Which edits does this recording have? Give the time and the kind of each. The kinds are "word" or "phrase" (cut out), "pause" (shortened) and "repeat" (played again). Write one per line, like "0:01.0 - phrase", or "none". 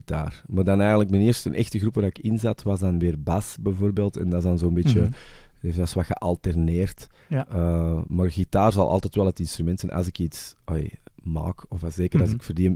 none

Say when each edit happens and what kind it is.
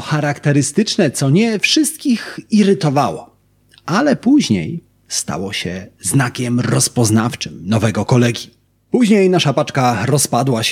none

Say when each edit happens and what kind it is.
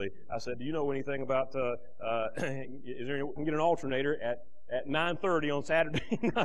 0:03.4 - phrase

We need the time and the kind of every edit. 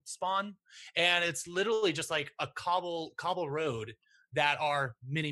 none

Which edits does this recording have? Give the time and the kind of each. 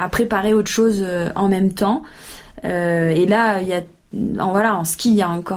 none

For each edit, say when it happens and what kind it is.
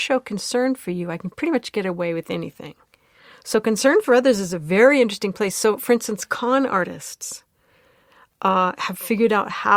none

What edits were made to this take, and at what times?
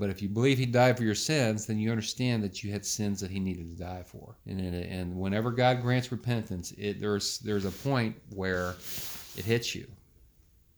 0:04.4 - pause

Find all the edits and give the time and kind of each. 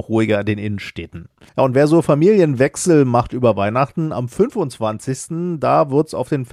0:01.5 - pause

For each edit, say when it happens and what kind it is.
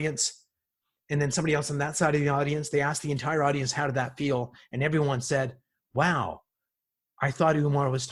none

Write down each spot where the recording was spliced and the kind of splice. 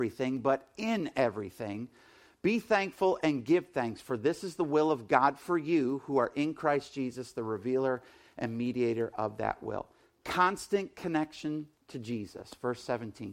none

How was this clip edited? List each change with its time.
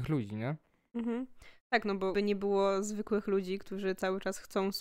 0:02.1 - word

